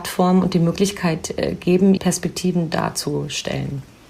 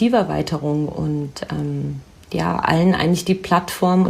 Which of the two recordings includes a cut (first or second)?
first